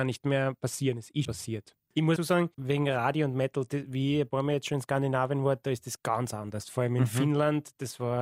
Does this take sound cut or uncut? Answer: cut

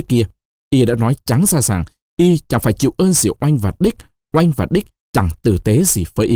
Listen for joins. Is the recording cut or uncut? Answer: uncut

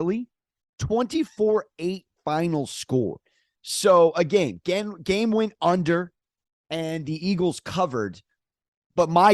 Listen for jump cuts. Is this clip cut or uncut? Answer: uncut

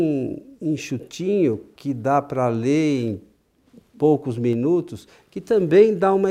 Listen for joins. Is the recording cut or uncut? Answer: uncut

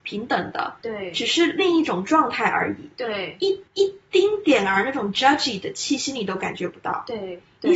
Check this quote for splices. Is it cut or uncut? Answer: cut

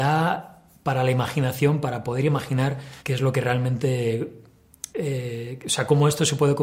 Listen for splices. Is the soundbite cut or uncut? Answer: cut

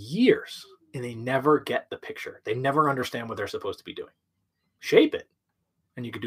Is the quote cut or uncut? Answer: uncut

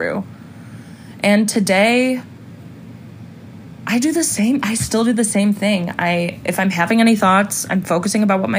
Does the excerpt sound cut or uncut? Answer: uncut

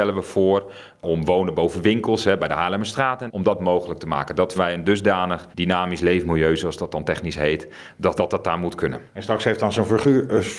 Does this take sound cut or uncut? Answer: cut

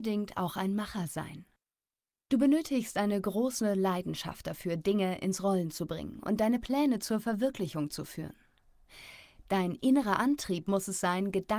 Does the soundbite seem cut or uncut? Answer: uncut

